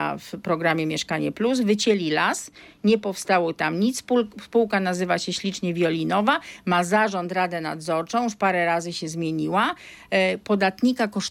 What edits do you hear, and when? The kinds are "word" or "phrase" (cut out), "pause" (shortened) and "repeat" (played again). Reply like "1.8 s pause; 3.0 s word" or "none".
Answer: none